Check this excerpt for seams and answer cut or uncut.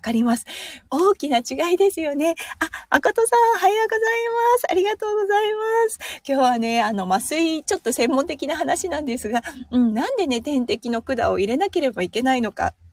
uncut